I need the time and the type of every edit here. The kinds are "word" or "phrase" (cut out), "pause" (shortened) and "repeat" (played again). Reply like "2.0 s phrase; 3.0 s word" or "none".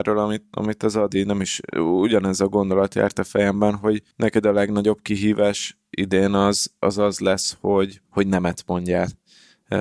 4.1 s pause; 8.0 s pause